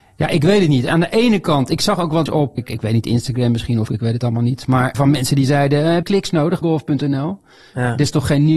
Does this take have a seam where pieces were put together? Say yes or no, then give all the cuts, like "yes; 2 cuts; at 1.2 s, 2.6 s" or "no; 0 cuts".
yes; 6 cuts; at 2.3 s, 2.6 s, 3.9 s, 4.9 s, 6.0 s, 6.6 s